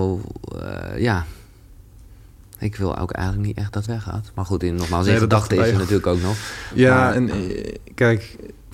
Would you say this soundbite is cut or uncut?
cut